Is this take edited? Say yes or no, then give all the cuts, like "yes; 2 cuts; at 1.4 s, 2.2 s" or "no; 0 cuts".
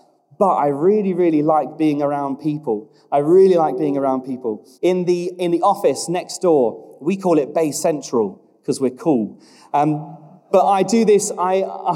yes; 1 cut; at 4.7 s